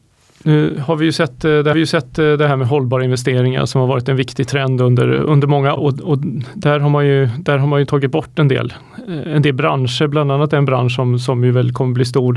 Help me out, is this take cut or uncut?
cut